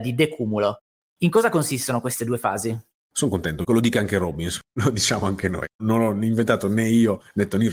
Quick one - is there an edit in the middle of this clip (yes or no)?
no